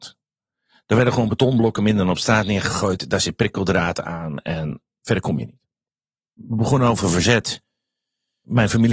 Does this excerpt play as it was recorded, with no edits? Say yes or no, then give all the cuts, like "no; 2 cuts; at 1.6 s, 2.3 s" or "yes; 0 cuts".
yes; 0 cuts